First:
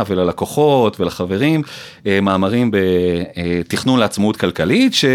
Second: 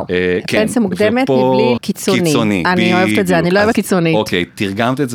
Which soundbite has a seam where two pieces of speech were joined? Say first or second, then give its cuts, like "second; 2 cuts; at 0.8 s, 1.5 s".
second; 2 cuts; at 1.8 s, 3.7 s